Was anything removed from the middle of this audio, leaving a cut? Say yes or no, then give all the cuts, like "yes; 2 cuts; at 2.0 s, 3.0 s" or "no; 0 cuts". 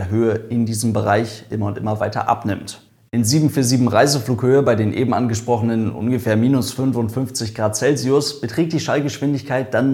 no; 0 cuts